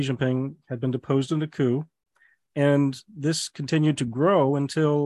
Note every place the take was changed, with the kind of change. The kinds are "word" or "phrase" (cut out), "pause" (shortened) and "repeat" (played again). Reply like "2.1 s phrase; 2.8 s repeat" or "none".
none

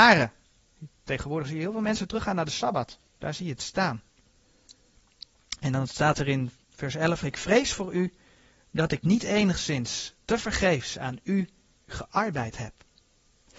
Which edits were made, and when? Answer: 3.1 s pause; 7.2 s word

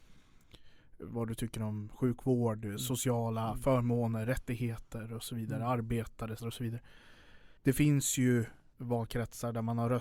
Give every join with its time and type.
6.4 s word; 7.6 s pause; 8.7 s phrase

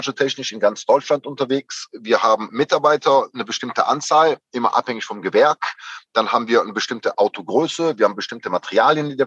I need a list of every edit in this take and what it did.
2.5 s word

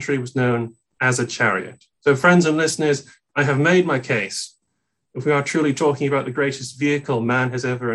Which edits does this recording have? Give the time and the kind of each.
1.9 s pause

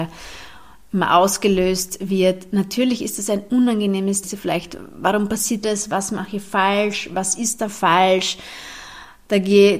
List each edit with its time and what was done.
4.2 s phrase; 5.6 s word

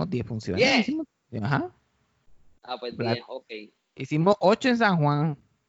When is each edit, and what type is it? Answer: none

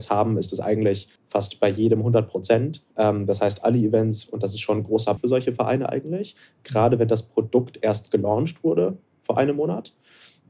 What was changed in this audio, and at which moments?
1.2 s pause; 2.9 s pause; 4.3 s phrase; 5.2 s word

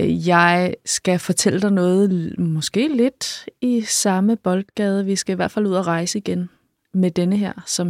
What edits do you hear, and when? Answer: none

